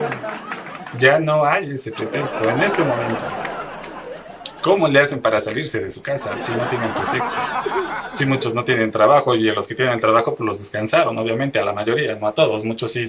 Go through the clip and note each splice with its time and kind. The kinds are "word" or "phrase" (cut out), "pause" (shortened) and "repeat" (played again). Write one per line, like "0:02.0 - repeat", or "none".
none